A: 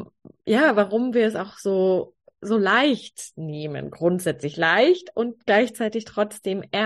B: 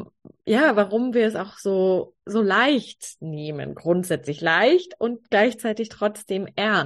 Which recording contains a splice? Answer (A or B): B